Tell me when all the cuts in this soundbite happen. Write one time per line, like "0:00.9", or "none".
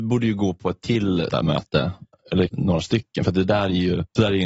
0:01.3
0:02.5

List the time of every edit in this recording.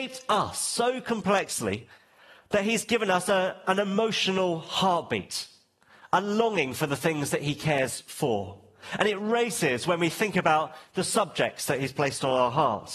none

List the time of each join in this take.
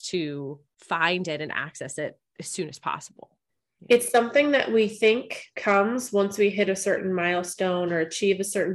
0:05.5

